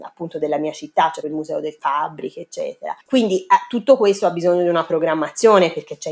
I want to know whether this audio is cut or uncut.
cut